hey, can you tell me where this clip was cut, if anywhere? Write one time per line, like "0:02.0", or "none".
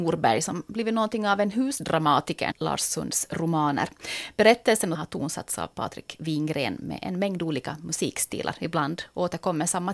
0:02.5
0:04.9